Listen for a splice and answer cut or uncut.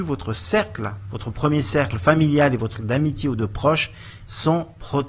cut